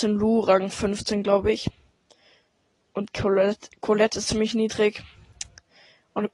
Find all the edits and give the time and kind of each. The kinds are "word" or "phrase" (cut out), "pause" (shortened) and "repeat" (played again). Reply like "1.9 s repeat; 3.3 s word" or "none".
4.2 s word